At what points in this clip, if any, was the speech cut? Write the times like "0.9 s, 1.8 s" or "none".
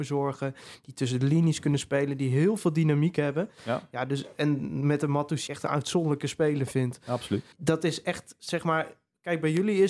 5.5 s, 7.5 s